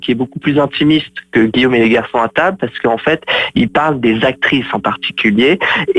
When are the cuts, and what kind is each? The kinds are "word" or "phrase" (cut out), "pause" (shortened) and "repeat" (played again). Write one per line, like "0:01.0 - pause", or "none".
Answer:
none